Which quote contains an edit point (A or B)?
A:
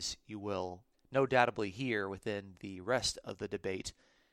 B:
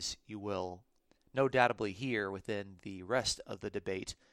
A